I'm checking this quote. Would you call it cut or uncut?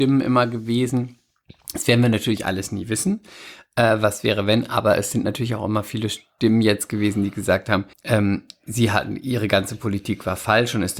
cut